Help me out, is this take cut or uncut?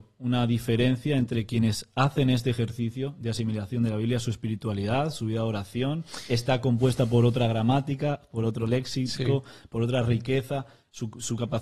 uncut